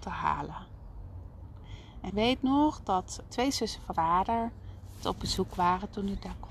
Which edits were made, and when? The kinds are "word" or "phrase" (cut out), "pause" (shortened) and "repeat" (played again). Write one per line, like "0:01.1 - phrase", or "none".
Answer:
0:02.1 - word
0:03.3 - word
0:03.9 - word
0:05.0 - word